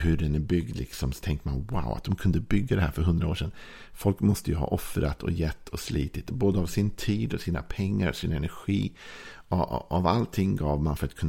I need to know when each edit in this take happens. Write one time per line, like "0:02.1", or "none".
0:05.7